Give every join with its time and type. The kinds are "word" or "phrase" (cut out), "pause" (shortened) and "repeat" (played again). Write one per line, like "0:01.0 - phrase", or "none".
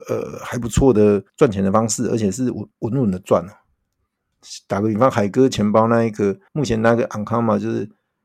0:01.3 - pause
0:02.7 - pause
0:06.5 - pause

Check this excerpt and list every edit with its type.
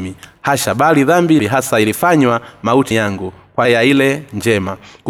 0:01.4 - phrase
0:02.9 - word
0:03.6 - word

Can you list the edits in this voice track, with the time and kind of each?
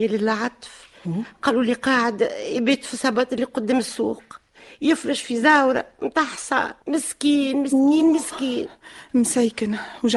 0:06.8 - pause

